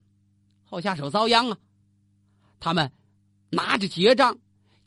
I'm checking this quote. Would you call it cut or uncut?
uncut